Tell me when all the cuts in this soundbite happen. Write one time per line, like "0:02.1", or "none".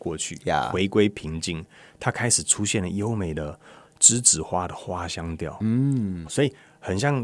0:06.3